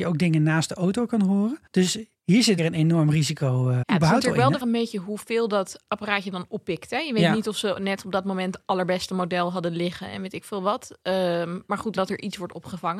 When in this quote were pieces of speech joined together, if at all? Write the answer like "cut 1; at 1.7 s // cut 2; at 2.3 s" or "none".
cut 1; at 1.7 s // cut 2; at 2.6 s // cut 3; at 3.8 s // cut 4; at 4.6 s // cut 5; at 12.0 s